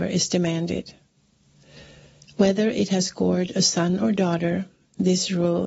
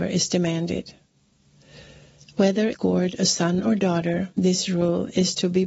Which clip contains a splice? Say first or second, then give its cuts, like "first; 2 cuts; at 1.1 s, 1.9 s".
second; 2 cuts; at 2.7 s, 4.3 s